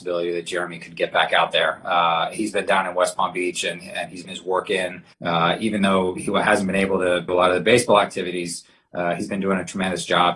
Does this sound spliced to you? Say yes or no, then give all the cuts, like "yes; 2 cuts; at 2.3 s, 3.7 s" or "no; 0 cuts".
yes; 3 cuts; at 4.2 s, 5.1 s, 7.3 s